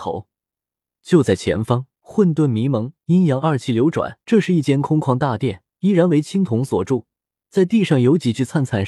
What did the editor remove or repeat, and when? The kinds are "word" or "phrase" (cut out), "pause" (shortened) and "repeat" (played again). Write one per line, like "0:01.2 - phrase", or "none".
0:01.9 - pause
0:03.0 - pause
0:04.2 - pause
0:05.7 - pause